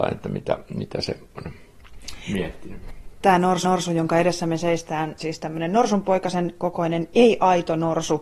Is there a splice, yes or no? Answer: yes